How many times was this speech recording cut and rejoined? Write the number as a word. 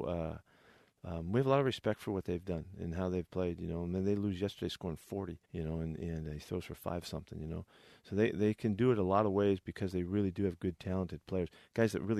one